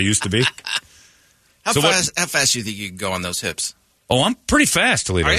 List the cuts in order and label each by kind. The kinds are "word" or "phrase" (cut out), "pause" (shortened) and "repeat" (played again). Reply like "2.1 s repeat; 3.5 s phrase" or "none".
none

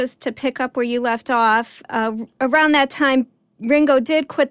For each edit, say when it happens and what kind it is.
none

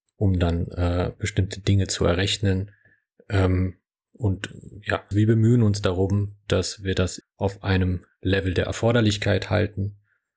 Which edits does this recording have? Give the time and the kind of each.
5.1 s word; 7.2 s word

